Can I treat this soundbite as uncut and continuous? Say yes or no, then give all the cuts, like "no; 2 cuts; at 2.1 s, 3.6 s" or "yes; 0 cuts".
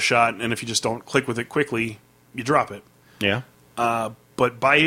yes; 0 cuts